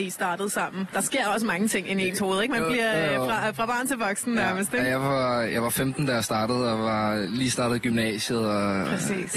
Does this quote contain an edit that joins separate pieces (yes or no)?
no